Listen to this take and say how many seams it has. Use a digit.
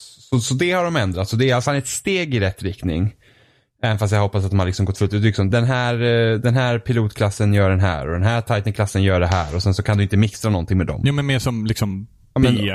1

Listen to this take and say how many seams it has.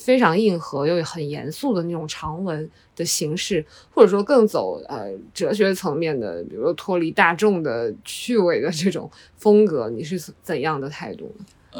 0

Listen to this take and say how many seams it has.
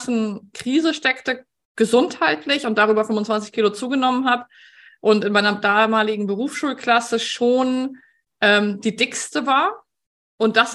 0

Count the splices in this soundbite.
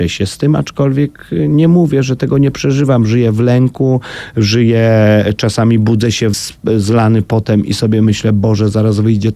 1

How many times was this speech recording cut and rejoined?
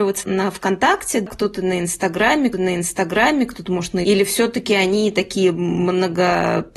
2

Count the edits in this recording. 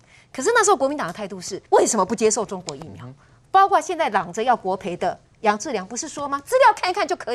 1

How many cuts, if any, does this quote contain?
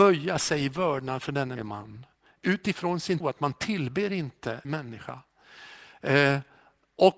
3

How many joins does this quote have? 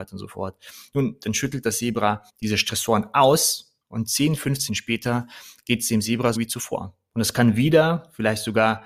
4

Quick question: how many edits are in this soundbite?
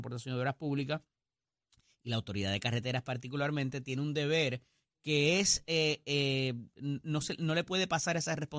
0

